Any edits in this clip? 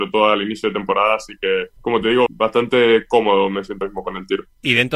yes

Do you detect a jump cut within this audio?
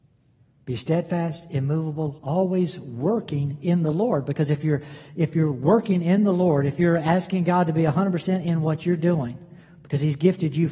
no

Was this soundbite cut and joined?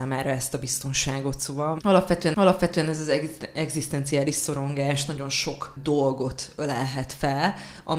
yes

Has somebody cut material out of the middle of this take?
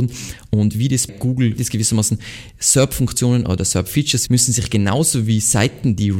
yes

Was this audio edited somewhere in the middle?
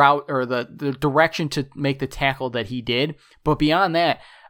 no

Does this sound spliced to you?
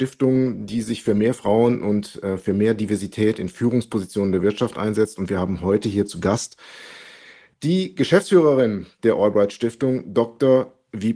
no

